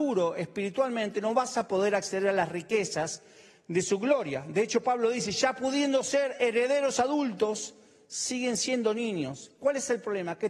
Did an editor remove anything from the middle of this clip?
no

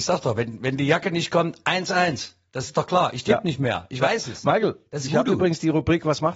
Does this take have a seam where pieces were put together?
no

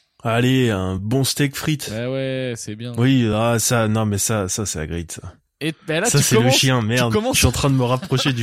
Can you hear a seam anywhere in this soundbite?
no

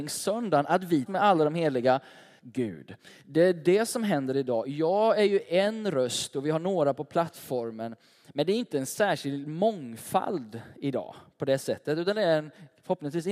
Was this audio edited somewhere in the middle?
yes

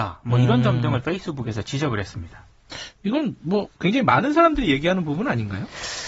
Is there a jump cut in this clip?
no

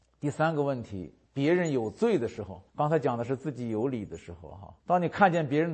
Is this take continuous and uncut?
no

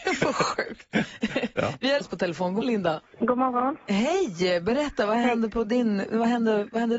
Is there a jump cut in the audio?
yes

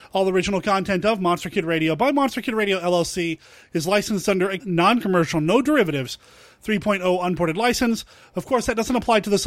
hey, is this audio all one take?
no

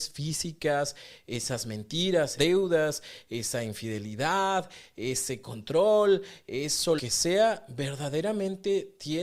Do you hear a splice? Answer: yes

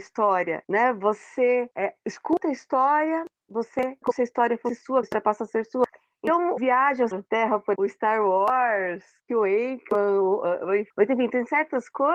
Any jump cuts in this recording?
yes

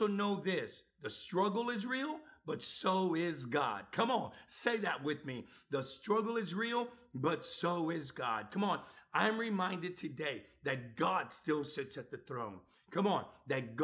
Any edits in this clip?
no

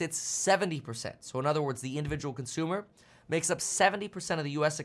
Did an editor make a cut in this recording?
no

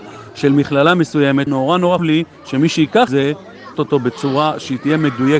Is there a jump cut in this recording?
yes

